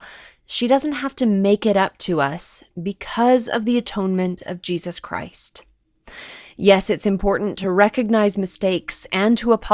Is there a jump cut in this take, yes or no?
no